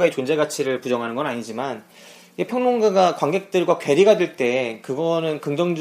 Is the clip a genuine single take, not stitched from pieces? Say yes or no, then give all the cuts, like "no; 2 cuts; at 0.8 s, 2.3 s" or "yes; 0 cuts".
no; 1 cut; at 2.5 s